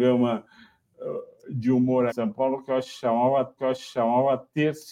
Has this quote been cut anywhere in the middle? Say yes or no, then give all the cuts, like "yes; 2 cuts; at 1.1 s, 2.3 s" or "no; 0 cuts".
yes; 2 cuts; at 2.1 s, 3.6 s